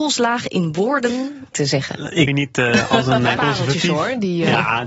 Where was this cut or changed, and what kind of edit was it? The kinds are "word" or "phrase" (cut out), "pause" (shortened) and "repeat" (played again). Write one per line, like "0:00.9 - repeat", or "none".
0:01.5 - word
0:02.3 - word
0:03.4 - word